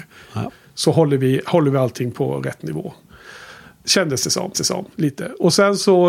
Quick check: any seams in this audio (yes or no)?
yes